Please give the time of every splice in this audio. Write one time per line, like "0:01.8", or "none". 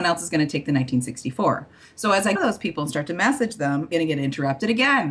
0:02.4
0:03.9